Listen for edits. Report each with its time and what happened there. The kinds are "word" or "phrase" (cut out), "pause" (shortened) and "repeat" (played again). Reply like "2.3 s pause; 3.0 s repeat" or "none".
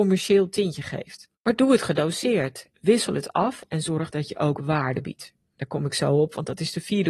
1.3 s pause